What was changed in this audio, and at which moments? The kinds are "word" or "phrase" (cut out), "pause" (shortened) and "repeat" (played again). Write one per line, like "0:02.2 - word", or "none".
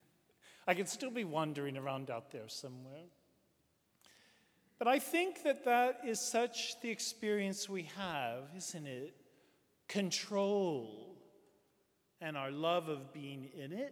none